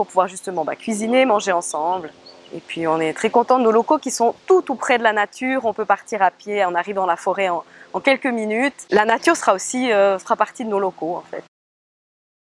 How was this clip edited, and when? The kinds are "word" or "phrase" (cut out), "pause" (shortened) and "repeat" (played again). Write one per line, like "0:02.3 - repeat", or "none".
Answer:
none